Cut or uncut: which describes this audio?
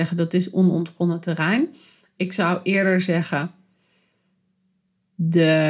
uncut